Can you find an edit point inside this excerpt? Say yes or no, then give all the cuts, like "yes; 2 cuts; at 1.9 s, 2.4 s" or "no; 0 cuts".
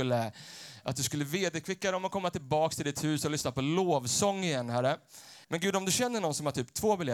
yes; 1 cut; at 5.4 s